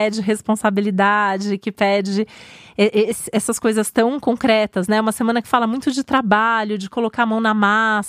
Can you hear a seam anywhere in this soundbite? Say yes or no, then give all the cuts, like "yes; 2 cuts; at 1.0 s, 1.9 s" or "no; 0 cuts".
no; 0 cuts